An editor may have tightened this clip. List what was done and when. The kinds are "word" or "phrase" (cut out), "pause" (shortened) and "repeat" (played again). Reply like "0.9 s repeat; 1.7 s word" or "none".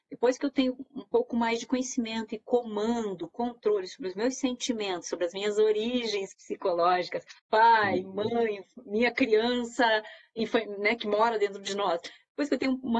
7.4 s pause